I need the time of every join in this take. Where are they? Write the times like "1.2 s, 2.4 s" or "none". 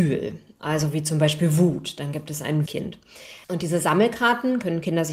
2.7 s, 3.4 s